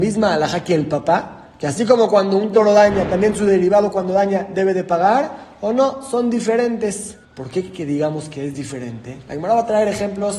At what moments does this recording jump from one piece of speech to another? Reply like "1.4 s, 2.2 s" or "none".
7.2 s

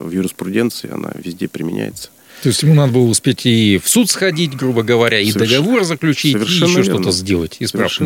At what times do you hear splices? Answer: none

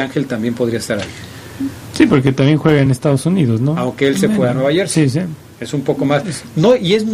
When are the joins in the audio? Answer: none

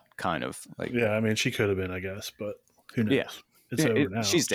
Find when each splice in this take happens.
none

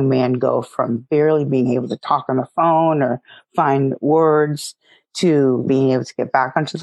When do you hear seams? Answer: none

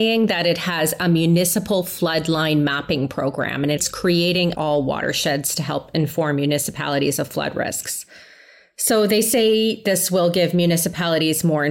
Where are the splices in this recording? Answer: 4.5 s

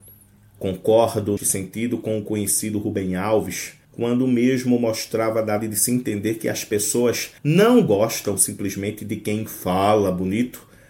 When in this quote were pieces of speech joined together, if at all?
1.4 s, 3.8 s, 5.6 s, 7.4 s

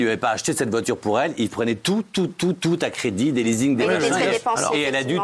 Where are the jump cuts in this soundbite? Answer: none

